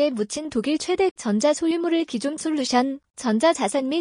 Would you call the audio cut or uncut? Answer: cut